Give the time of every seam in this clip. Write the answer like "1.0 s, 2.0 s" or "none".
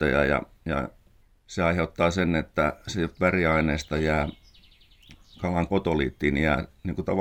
1.2 s, 5.7 s